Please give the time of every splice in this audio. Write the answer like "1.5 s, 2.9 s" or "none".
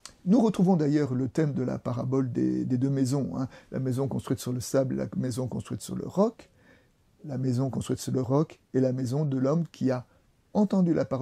8.6 s